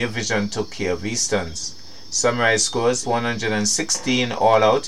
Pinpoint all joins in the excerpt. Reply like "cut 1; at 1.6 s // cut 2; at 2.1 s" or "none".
cut 1; at 3.0 s